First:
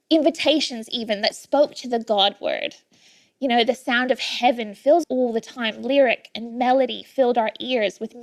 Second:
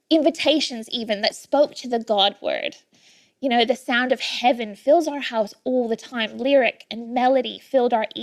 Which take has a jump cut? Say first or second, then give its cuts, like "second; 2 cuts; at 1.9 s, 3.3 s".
first; 1 cut; at 5.0 s